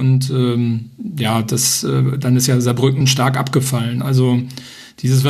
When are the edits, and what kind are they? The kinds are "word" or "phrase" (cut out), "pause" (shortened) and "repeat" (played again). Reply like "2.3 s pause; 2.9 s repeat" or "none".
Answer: 3.0 s word